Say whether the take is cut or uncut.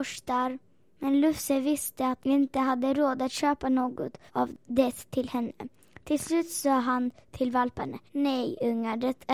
cut